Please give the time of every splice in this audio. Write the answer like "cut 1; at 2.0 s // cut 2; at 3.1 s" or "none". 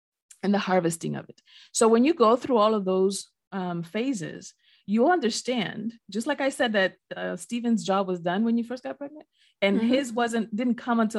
none